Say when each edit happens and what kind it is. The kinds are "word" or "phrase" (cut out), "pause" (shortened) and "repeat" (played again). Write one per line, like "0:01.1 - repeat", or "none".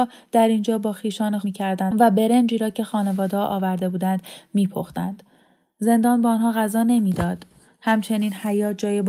0:01.4 - phrase